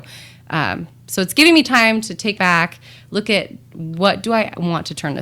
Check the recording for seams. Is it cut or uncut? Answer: cut